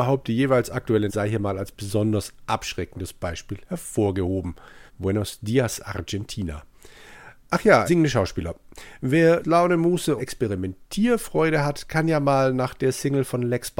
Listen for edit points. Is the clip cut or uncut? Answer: cut